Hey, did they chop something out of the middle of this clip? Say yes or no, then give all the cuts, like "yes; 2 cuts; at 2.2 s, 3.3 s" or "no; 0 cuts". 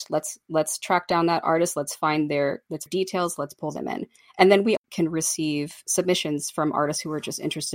yes; 2 cuts; at 2.9 s, 4.8 s